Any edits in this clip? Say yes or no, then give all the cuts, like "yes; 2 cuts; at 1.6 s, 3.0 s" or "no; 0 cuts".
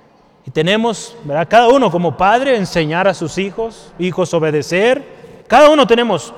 yes; 1 cut; at 5.4 s